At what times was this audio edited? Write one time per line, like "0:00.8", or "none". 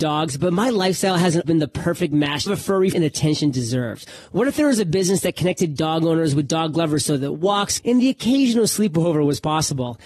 0:01.4
0:02.5
0:02.9
0:07.8

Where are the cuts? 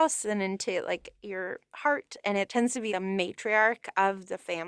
0:02.9

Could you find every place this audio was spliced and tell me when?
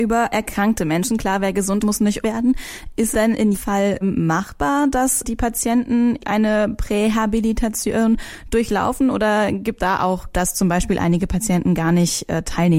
0:01.8
0:02.2
0:03.1
0:03.5
0:04.0
0:05.2
0:06.2
0:09.8
0:10.3

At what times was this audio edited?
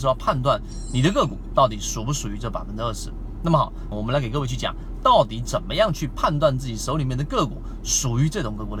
0:03.9

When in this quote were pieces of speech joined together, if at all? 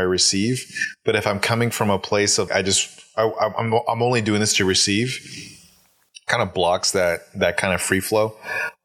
0:02.5

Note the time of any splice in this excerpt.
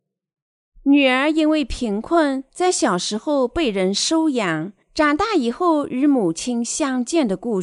0:04.8

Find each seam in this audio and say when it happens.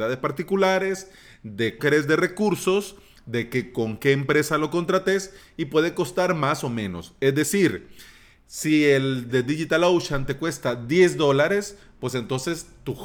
0:01.8
0:09.3

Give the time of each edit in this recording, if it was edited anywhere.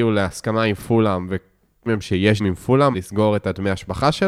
0:01.9
0:02.4
0:02.9

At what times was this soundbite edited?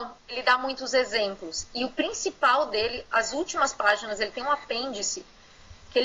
none

